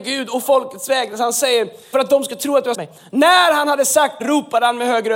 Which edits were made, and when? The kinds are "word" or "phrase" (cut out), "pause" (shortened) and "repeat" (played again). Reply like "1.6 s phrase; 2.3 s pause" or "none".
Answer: 1.9 s word; 2.7 s word; 4.2 s word